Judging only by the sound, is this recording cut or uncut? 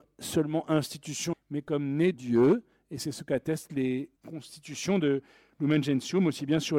cut